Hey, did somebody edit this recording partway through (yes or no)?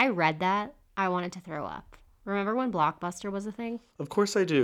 no